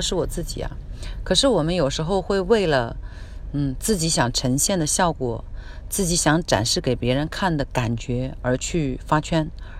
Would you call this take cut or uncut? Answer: uncut